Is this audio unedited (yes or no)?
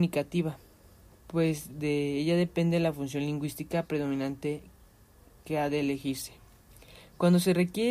yes